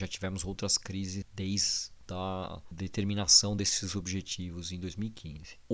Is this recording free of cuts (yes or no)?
yes